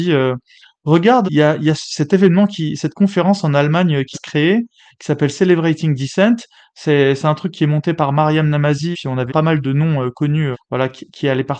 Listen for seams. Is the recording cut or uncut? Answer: cut